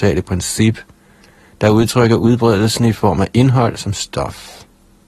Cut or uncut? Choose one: uncut